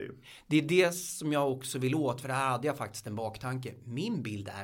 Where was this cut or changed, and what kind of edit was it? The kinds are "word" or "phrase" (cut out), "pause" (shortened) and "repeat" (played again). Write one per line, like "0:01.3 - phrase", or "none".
none